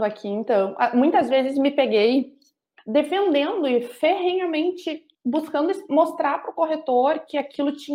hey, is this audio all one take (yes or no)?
no